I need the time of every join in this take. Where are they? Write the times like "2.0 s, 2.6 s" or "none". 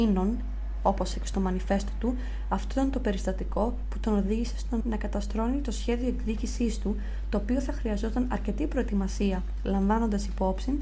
1.1 s, 4.8 s